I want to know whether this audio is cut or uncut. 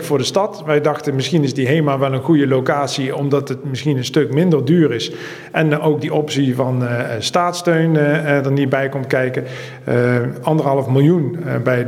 uncut